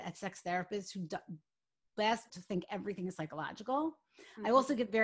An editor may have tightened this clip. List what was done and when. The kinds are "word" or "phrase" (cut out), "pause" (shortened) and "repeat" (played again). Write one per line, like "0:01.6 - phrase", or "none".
0:02.3 - word